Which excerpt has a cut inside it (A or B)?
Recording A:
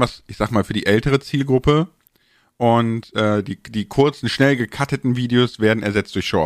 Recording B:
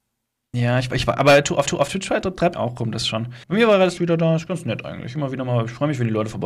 B